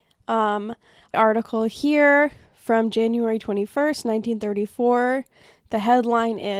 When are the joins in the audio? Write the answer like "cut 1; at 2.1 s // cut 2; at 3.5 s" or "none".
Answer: cut 1; at 1.1 s